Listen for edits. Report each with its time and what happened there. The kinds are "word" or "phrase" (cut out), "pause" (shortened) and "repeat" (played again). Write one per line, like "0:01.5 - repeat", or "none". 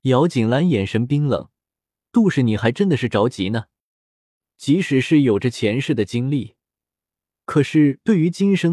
none